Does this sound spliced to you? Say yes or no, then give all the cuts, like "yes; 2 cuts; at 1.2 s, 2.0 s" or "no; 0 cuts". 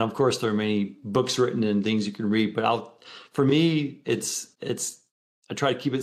yes; 1 cut; at 4.5 s